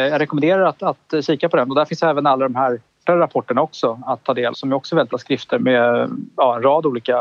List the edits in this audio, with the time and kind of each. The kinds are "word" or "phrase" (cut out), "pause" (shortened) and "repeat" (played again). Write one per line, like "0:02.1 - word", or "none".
0:03.0 - word
0:04.5 - word
0:05.1 - word
0:05.6 - word

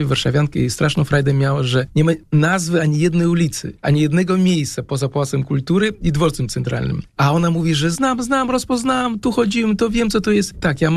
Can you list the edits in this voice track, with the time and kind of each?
0:07.9 - word

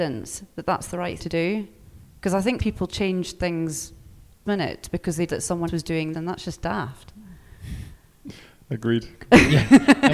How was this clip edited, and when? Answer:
0:01.2 - word
0:02.6 - word
0:04.5 - word
0:05.3 - word
0:05.7 - word
0:06.1 - word

